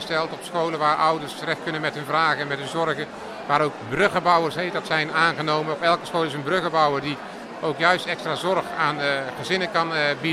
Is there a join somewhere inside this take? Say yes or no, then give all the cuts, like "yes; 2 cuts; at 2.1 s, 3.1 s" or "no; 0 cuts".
no; 0 cuts